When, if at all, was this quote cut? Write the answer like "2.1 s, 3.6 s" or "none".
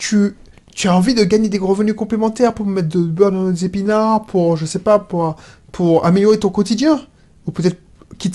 none